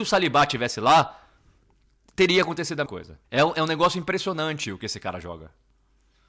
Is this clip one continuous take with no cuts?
no; 2 cuts; at 2.9 s, 3.2 s

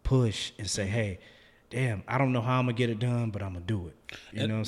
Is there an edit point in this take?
no; 0 cuts

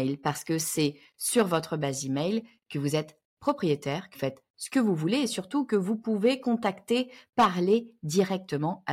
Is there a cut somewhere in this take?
yes; 1 cut; at 4.1 s

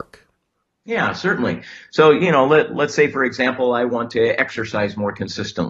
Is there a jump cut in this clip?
no; 0 cuts

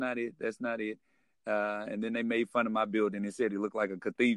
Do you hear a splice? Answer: no; 0 cuts

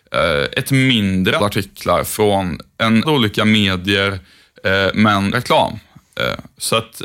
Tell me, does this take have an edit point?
yes; 3 cuts; at 1.4 s, 3.0 s, 5.3 s

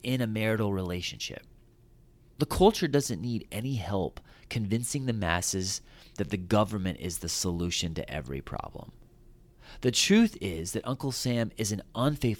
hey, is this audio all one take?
yes; 0 cuts

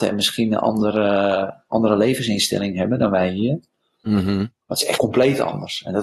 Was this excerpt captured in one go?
no; 2 cuts; at 4.6 s, 5.0 s

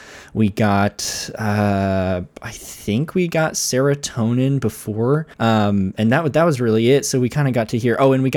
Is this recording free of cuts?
no; 1 cut; at 5.3 s

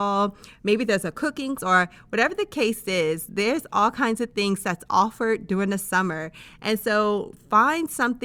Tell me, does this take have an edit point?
yes; 1 cut; at 1.6 s

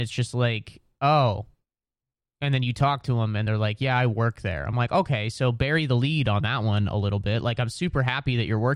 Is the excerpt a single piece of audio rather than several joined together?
yes; 0 cuts

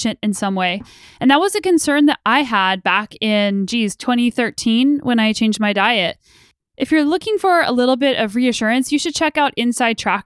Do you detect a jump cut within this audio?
no; 0 cuts

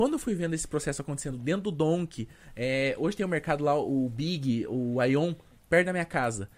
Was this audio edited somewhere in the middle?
no; 0 cuts

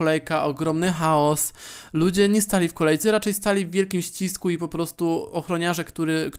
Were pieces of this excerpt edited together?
yes; 1 cut; at 3.0 s

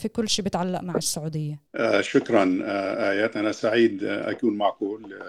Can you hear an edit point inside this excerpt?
yes; 1 cut; at 1.7 s

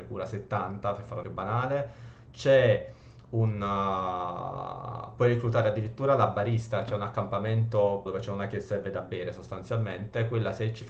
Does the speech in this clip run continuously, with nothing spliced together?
no; 2 cuts; at 1.2 s, 8.1 s

